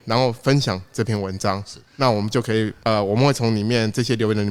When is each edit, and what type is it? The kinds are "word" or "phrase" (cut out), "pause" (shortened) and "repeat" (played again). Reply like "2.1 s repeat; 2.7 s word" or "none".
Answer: 1.8 s pause; 2.8 s pause